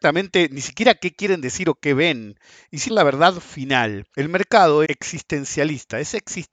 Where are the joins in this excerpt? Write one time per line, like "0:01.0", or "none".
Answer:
0:02.9
0:04.1
0:04.8